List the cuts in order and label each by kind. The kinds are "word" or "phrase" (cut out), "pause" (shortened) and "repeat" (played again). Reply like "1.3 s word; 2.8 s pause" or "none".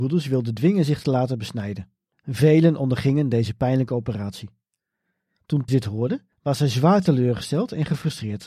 2.1 s pause; 5.7 s word; 6.3 s pause

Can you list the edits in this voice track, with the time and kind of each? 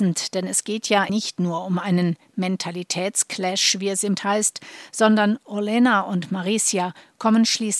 1.1 s word; 4.2 s word

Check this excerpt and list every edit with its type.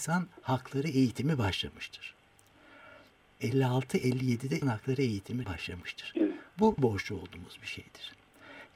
4.6 s word; 5.4 s word; 6.8 s word

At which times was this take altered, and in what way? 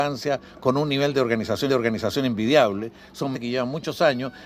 1.7 s repeat; 3.3 s word

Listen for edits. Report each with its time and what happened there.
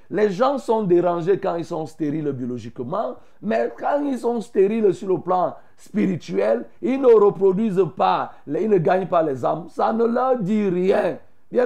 none

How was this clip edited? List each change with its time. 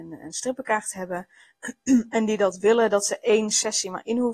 none

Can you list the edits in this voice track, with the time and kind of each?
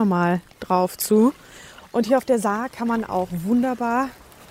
none

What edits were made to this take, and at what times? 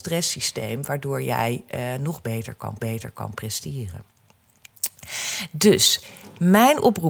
2.8 s repeat

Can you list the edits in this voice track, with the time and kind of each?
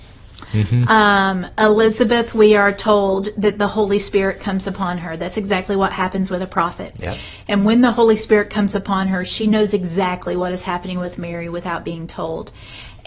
none

